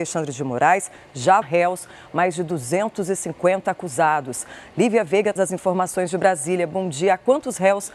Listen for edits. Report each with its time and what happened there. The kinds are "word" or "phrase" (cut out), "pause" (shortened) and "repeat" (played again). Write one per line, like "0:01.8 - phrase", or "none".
0:01.4 - phrase
0:05.4 - word

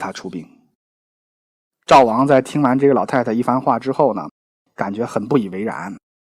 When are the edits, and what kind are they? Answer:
none

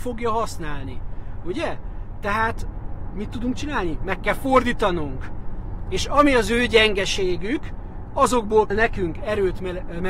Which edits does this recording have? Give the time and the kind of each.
0:08.7 - word

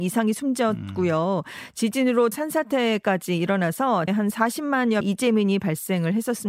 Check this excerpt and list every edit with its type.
0:02.3 - word
0:04.1 - word
0:05.0 - word

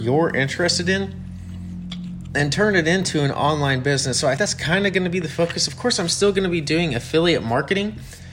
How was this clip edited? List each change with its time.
0:04.4 - word

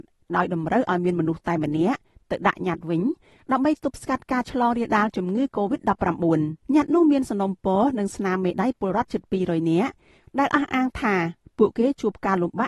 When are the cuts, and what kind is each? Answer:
0:06.6 - pause

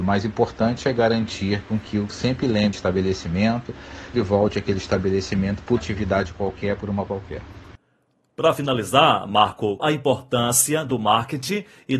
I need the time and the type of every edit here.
0:02.1 - word
0:02.7 - word
0:04.1 - word
0:05.8 - word
0:07.1 - word
0:09.8 - word

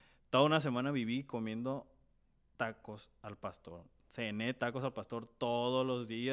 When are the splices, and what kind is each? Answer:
none

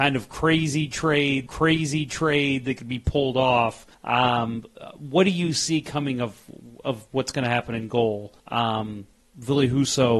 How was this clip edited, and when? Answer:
0:01.5 - repeat
0:03.9 - pause
0:08.4 - pause

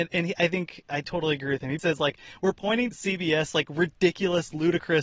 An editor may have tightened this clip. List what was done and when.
0:01.8 - word
0:02.9 - phrase

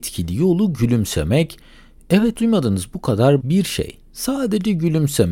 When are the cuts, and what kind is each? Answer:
0:02.4 - word
0:03.4 - word

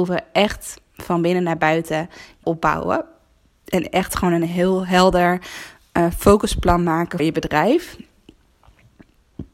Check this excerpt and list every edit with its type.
0:02.4 - word
0:07.2 - word

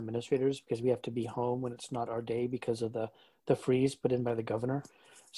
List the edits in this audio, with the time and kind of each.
none

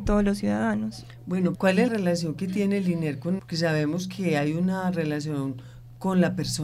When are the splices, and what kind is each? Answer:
0:01.5 - word
0:01.9 - word
0:03.4 - word

